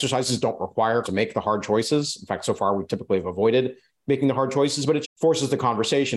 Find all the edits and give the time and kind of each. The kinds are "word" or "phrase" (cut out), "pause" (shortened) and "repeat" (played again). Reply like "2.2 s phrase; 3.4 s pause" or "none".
1.0 s word; 5.0 s word